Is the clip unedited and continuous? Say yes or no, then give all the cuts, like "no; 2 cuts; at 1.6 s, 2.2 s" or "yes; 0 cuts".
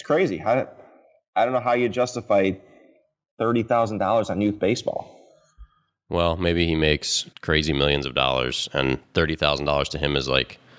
no; 1 cut; at 7.3 s